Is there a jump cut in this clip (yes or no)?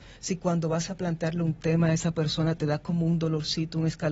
no